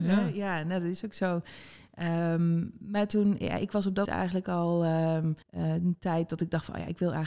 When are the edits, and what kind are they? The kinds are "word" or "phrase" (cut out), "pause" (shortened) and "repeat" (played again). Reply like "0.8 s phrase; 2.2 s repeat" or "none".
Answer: 4.1 s word; 5.4 s pause